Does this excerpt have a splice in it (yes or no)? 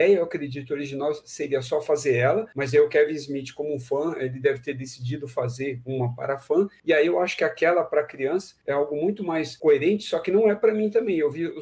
no